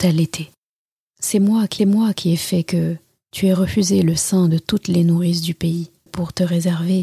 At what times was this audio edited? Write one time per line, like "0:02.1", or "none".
0:01.8
0:06.1